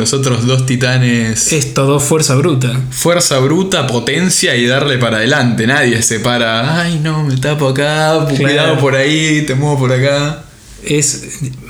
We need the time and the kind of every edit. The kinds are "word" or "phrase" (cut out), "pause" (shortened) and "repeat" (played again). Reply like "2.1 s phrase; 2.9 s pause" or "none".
none

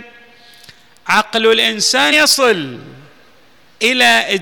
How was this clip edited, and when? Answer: 2.1 s word

